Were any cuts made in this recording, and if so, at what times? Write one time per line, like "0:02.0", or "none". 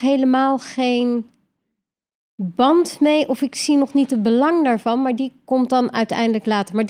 none